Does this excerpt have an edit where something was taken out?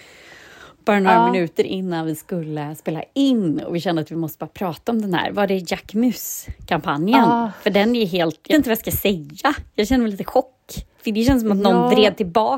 yes; 2 cuts; at 8.5 s, 10.9 s

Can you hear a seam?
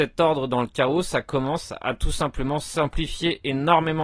no; 0 cuts

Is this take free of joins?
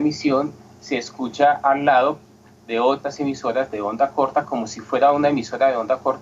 yes; 0 cuts

